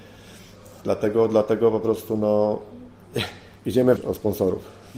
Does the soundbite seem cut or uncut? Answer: cut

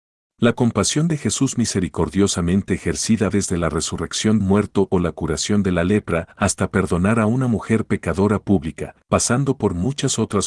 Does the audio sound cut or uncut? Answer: cut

